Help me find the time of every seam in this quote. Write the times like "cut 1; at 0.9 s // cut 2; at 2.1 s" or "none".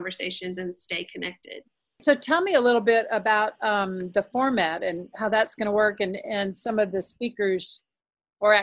none

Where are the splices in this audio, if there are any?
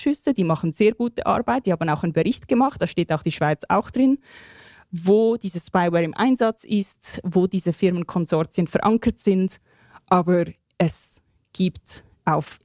none

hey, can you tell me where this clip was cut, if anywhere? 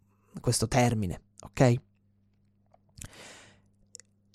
cut 1; at 1.3 s

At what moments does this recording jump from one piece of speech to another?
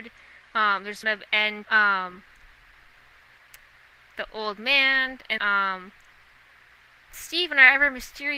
cut 1; at 1.0 s // cut 2; at 1.6 s // cut 3; at 5.4 s

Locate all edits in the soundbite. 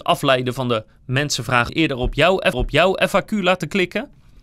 cut 1; at 1.7 s // cut 2; at 2.5 s

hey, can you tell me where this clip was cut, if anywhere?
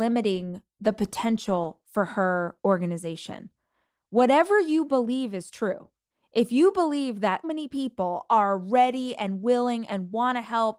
cut 1; at 7.4 s

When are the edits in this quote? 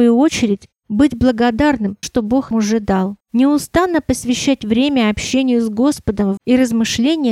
cut 1; at 2.0 s // cut 2; at 2.5 s // cut 3; at 3.2 s // cut 4; at 6.4 s

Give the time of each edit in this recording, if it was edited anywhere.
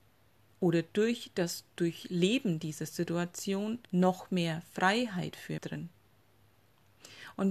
cut 1; at 3.8 s // cut 2; at 5.6 s

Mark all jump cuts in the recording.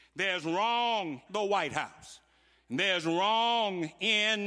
cut 1; at 1.3 s

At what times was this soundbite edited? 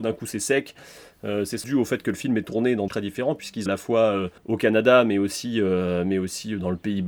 cut 1; at 1.6 s // cut 2; at 2.9 s // cut 3; at 3.7 s // cut 4; at 4.4 s

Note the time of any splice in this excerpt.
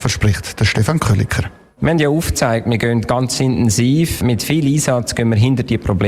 none

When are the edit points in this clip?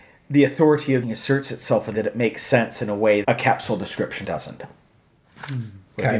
cut 1; at 1.0 s // cut 2; at 1.9 s // cut 3; at 3.2 s // cut 4; at 4.2 s

